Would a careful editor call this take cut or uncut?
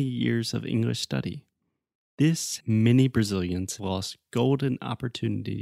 cut